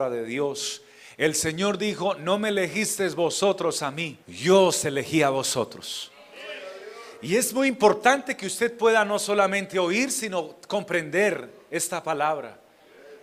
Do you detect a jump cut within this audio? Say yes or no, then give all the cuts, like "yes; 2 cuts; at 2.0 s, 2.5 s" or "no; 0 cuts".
yes; 1 cut; at 4.2 s